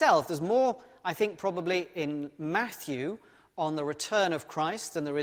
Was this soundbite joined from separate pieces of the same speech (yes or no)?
no